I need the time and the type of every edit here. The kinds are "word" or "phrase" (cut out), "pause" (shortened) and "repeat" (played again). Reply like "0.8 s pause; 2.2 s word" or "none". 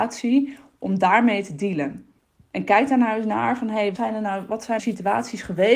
2.2 s pause; 3.9 s word; 4.8 s word